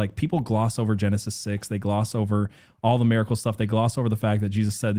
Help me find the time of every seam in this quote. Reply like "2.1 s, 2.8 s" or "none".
none